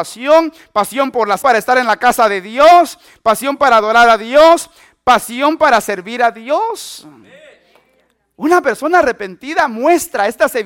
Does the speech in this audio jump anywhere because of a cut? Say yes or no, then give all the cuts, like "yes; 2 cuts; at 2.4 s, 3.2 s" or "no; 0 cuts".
yes; 1 cut; at 1.4 s